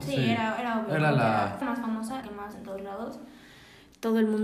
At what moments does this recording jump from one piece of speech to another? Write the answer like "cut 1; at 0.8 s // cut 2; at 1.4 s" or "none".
cut 1; at 1.6 s // cut 2; at 2.2 s // cut 3; at 2.5 s